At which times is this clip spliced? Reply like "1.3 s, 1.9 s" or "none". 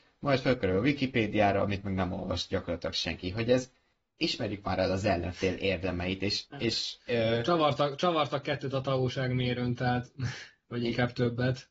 3.9 s, 7.0 s